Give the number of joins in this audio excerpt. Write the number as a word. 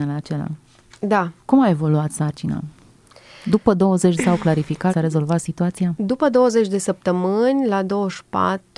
three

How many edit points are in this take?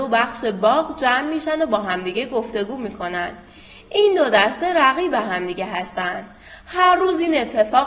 zero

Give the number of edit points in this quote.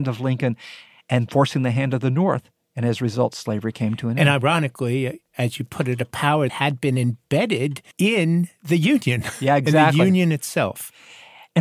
two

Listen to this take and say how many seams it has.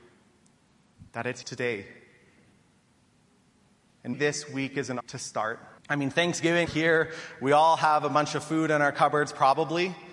six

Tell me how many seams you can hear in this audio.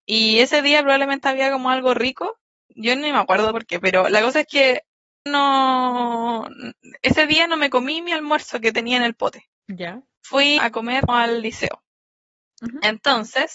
four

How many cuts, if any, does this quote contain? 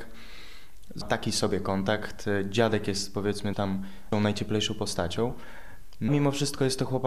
four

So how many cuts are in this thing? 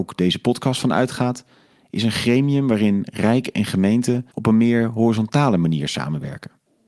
one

